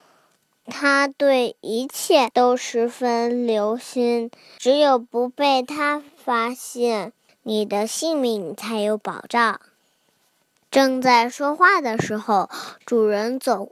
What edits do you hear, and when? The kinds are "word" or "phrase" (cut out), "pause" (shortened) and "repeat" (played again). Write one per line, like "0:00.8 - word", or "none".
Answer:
none